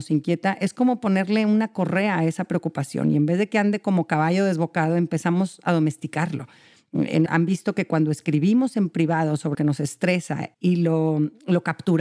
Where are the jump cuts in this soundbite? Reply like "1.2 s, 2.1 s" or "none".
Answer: 7.3 s, 9.5 s, 10.5 s